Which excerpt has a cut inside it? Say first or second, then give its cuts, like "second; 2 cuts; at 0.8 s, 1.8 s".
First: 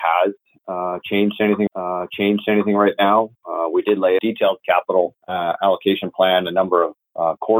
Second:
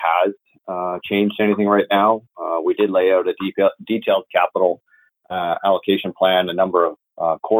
first; 3 cuts; at 1.7 s, 4.2 s, 5.2 s